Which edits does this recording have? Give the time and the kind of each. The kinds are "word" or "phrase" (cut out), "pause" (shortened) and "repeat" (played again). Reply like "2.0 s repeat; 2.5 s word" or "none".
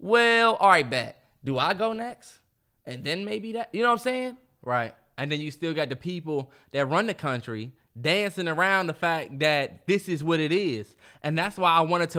none